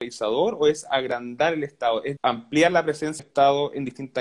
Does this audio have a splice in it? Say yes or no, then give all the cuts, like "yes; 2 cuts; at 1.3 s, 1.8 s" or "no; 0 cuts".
yes; 2 cuts; at 2.2 s, 3.2 s